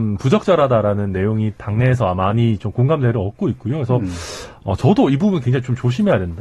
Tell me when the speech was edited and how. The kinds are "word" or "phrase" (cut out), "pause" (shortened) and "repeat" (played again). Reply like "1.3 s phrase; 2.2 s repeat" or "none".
none